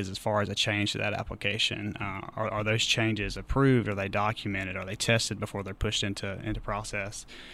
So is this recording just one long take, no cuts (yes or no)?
yes